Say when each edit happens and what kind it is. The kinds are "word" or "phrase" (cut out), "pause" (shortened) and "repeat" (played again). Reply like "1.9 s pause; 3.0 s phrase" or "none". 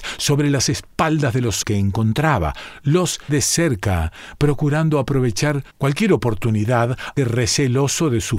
1.6 s word; 3.3 s word; 5.7 s pause; 7.2 s word